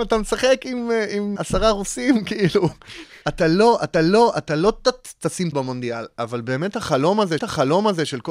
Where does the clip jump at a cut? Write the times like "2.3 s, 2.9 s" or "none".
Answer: 1.4 s, 3.2 s, 3.9 s, 5.5 s, 7.4 s